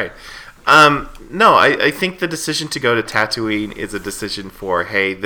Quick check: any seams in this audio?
no; 0 cuts

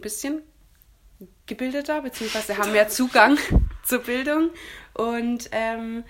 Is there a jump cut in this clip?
no; 0 cuts

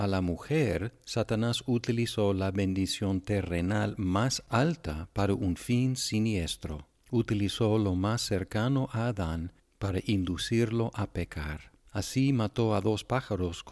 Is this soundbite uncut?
no; 1 cut; at 11.8 s

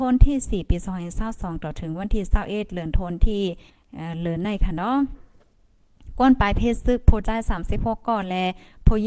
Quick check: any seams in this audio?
yes; 1 cut; at 3.7 s

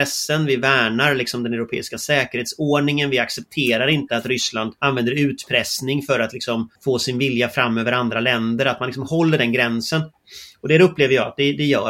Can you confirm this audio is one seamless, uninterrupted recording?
no; 2 cuts; at 4.8 s, 6.8 s

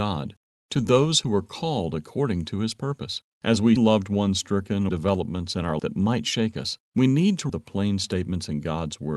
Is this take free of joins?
no; 6 cuts; at 3.3 s, 3.8 s, 4.9 s, 5.8 s, 6.9 s, 7.5 s

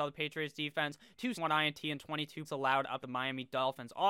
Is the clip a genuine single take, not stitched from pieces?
no; 3 cuts; at 1.3 s, 2.4 s, 3.0 s

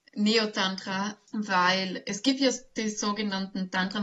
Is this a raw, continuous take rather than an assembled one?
yes; 0 cuts

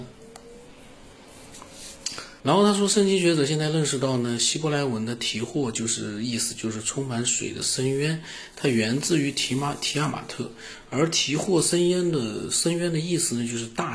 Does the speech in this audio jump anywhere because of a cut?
yes; 1 cut; at 2.4 s

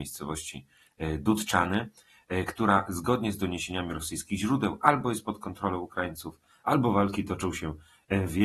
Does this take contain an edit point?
no; 0 cuts

